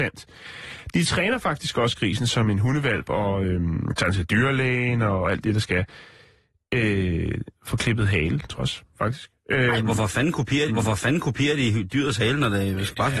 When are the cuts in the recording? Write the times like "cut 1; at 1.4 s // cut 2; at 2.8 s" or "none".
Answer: cut 1; at 7.5 s // cut 2; at 8.6 s // cut 3; at 10.7 s